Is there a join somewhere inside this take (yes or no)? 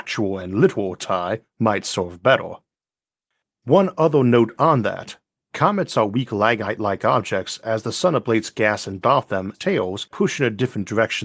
yes